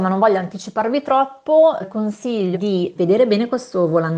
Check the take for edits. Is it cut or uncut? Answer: cut